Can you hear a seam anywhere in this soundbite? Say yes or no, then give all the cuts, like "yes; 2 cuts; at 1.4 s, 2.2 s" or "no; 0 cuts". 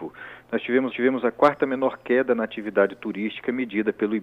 yes; 1 cut; at 0.9 s